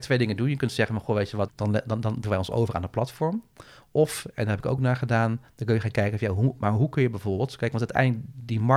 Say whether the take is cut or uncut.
cut